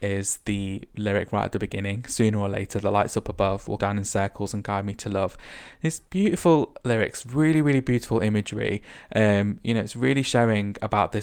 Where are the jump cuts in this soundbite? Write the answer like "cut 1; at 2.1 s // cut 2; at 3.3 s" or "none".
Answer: cut 1; at 3.8 s